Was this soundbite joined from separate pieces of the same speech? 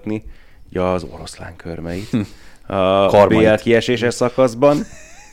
no; 0 cuts

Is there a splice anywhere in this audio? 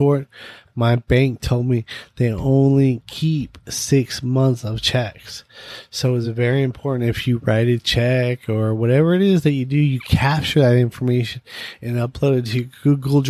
no; 0 cuts

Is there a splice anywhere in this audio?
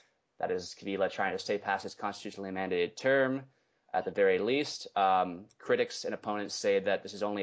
no; 0 cuts

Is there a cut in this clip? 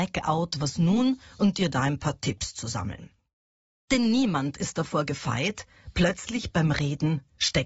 no; 0 cuts

